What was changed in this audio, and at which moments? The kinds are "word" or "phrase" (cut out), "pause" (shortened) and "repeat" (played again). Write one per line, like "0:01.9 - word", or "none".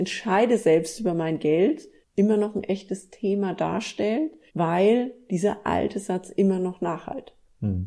0:02.0 - pause
0:04.5 - pause